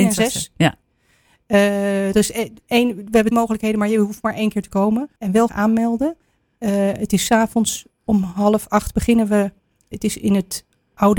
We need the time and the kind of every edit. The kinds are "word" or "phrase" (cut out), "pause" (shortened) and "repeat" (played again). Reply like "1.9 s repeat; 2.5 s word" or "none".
3.3 s word; 5.2 s pause; 5.5 s word; 9.9 s word